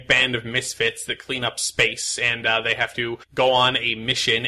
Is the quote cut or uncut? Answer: cut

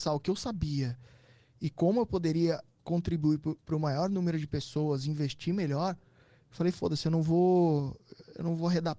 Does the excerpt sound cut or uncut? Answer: cut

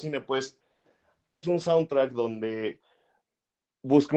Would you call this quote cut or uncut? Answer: cut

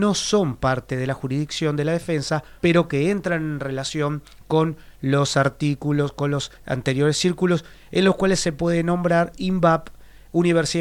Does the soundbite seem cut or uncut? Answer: cut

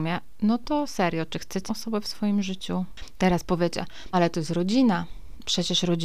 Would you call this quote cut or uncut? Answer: cut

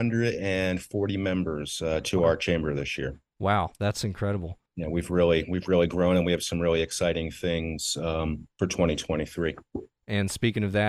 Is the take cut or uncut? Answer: cut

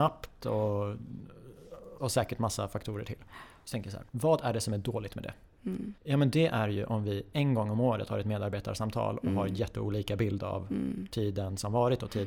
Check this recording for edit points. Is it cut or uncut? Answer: cut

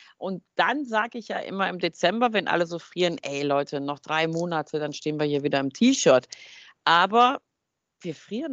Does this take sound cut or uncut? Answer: uncut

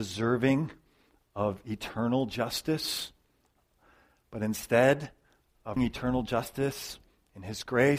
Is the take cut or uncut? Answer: cut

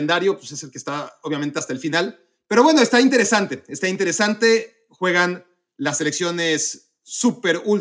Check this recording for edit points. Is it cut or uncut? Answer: uncut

